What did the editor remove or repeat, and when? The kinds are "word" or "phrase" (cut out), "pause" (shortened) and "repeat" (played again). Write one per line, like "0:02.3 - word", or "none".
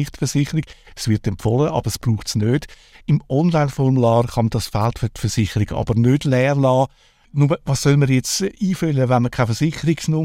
none